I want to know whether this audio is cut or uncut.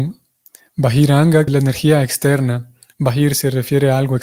cut